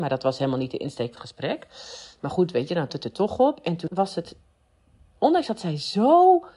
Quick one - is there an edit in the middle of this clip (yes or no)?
yes